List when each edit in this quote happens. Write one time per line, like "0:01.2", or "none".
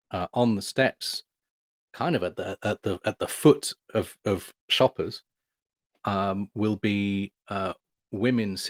none